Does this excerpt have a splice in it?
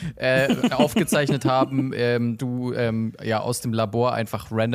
yes; 1 cut; at 2.4 s

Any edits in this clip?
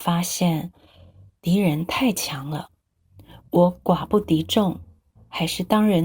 yes; 1 cut; at 5.2 s

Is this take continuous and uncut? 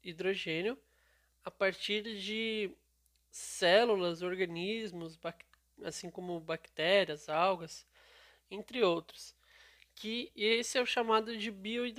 yes; 0 cuts

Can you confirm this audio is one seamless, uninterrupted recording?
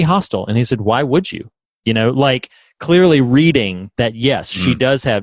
yes; 0 cuts

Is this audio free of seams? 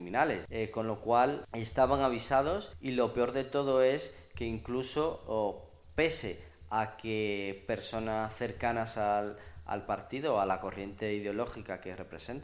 yes; 0 cuts

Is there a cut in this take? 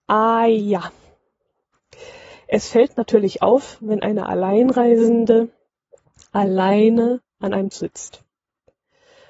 yes; 1 cut; at 7.7 s

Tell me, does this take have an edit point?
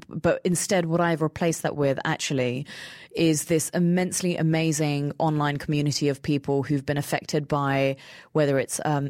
no; 0 cuts

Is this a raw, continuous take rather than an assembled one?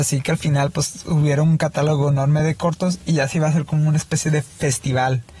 yes; 0 cuts

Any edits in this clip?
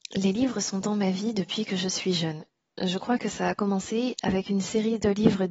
no; 0 cuts

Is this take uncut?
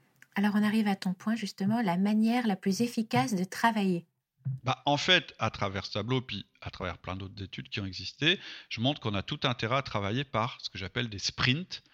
yes; 0 cuts

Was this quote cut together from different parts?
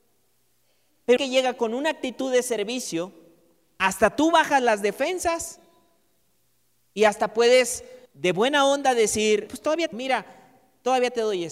yes; 4 cuts; at 1.2 s, 8.1 s, 9.5 s, 9.9 s

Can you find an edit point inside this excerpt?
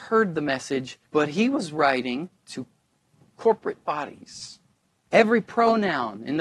yes; 3 cuts; at 1.1 s, 2.4 s, 4.9 s

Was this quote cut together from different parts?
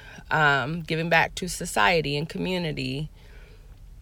no; 0 cuts

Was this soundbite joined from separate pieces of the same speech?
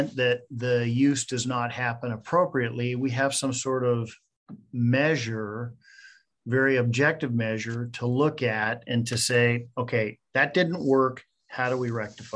no; 0 cuts

